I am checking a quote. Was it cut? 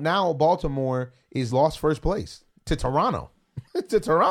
yes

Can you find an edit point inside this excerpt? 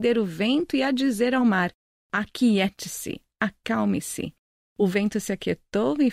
no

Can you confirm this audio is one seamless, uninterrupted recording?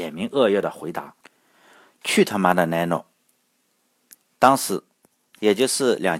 yes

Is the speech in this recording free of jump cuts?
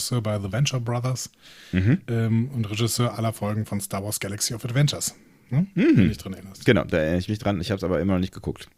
yes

